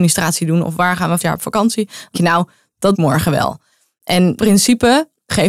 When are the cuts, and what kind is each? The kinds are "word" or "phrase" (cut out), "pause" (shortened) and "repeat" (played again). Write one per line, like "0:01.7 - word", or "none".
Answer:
0:01.2 - word
0:02.1 - word
0:02.9 - word
0:04.4 - word